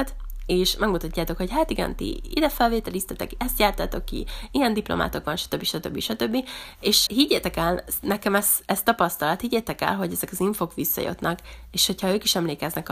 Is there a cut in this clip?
yes; 1 cut; at 7.1 s

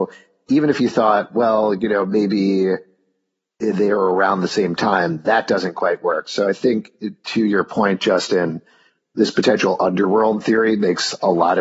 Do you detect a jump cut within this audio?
no; 0 cuts

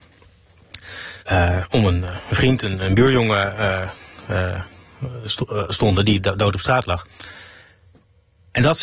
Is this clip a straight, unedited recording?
no; 1 cut; at 1.2 s

